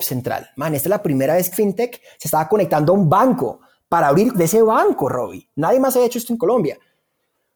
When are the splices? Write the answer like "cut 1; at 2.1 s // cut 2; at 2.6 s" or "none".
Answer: cut 1; at 1.5 s // cut 2; at 4.3 s

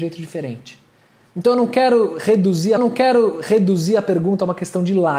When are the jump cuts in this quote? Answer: cut 1; at 2.8 s

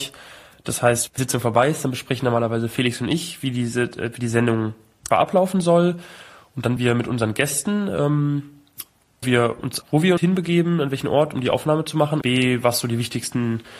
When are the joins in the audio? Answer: cut 1; at 1.2 s // cut 2; at 5.1 s // cut 3; at 6.8 s // cut 4; at 9.2 s // cut 5; at 9.8 s // cut 6; at 10.2 s // cut 7; at 12.2 s

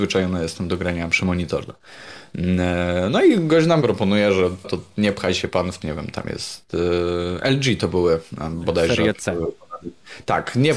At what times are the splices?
cut 1; at 3.8 s // cut 2; at 4.6 s // cut 3; at 5.8 s

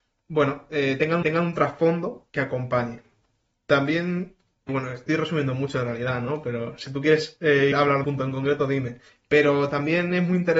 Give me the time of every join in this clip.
cut 1; at 1.2 s // cut 2; at 2.3 s // cut 3; at 4.7 s // cut 4; at 7.7 s // cut 5; at 8.0 s // cut 6; at 9.1 s

